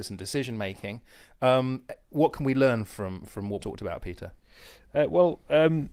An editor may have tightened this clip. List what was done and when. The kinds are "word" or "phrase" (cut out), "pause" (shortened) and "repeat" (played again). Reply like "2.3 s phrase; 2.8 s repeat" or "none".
3.6 s phrase